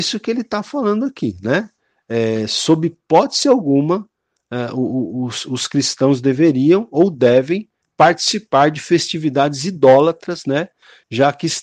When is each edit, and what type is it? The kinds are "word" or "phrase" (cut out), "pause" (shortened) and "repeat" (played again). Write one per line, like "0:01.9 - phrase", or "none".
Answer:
none